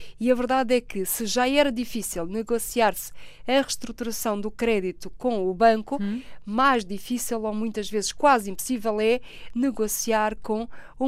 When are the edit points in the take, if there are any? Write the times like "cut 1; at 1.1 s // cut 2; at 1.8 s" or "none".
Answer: none